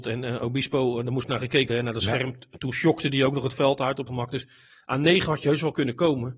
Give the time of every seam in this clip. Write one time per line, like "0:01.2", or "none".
0:01.7
0:04.1